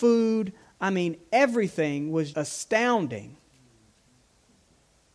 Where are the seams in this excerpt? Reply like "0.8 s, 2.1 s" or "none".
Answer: 2.3 s